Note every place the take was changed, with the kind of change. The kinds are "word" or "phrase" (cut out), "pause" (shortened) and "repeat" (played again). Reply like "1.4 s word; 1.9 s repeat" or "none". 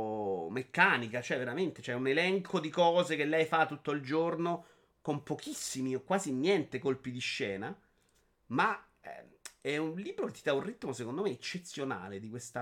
none

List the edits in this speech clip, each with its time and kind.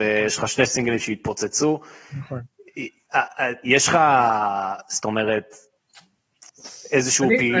none

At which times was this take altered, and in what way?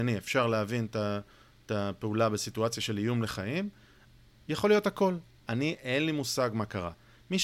none

